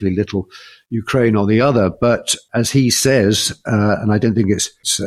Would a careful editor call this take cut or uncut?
uncut